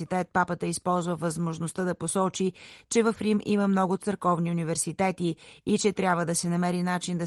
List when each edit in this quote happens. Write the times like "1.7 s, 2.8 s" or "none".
none